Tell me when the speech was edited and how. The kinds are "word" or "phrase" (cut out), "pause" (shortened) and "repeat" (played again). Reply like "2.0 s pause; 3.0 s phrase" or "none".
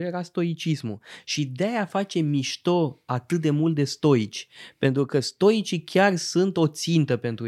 none

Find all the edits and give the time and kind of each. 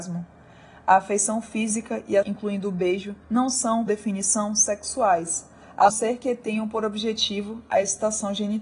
2.2 s word; 3.2 s pause; 3.9 s word; 5.9 s word

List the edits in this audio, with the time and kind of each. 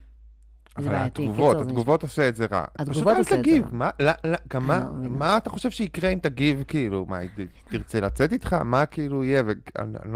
none

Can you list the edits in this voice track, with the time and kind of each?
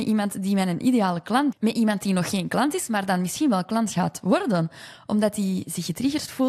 1.5 s word

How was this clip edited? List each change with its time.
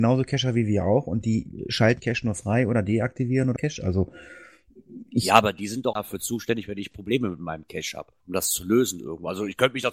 2.0 s word; 3.6 s word; 5.9 s word; 8.2 s pause

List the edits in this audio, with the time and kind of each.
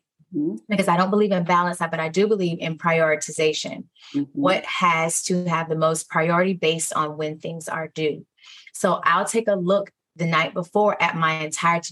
none

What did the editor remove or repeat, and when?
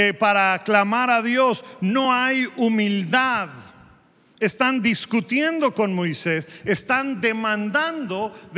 none

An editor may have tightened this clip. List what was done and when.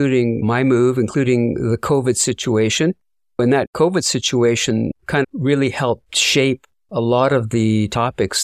5.2 s word

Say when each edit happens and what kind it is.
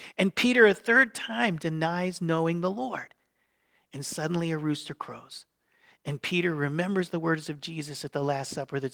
none

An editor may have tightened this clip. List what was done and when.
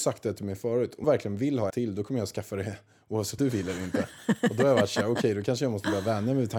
1.0 s word; 1.7 s word; 3.4 s word

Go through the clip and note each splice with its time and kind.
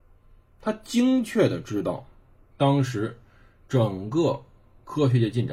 none

